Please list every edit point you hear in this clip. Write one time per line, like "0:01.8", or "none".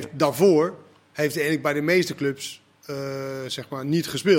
0:02.7